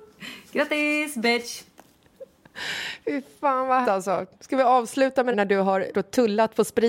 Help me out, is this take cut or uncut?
cut